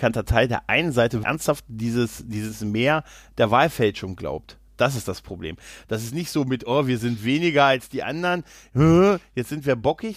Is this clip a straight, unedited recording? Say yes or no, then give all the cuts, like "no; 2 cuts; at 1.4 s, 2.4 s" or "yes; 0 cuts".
no; 1 cut; at 1.2 s